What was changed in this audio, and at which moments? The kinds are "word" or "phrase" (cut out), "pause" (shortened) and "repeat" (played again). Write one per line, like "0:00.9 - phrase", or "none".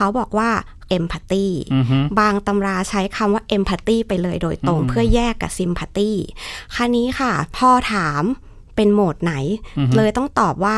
0:00.9 - word

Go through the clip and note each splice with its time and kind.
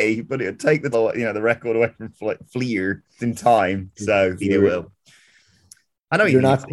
0:00.9 - word
0:03.2 - word
0:04.4 - word

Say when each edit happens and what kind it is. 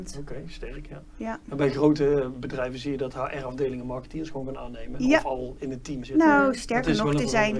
0:06.0 - word

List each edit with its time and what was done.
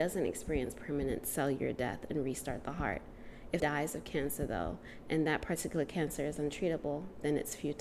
0:03.6 - word

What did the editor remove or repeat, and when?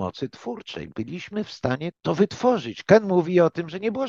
0:01.9 - word

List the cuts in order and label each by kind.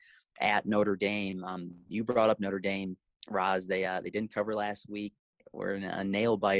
none

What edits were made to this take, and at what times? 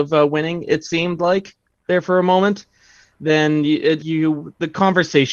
0:04.0 - word

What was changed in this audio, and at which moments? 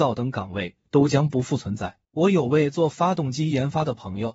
0:02.0 - pause

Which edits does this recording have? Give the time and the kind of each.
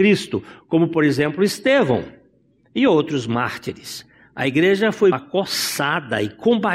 0:05.1 - word

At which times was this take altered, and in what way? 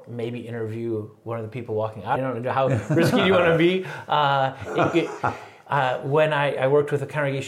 0:02.2 - phrase

